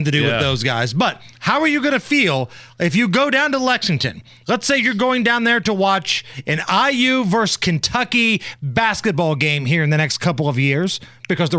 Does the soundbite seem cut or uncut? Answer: uncut